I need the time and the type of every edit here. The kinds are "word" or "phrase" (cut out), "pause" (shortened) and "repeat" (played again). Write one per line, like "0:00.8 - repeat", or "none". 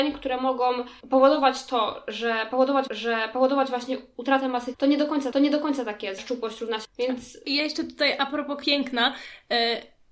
0:01.0 - pause
0:02.9 - repeat
0:04.7 - word
0:05.3 - repeat
0:06.2 - word
0:06.8 - word
0:08.6 - word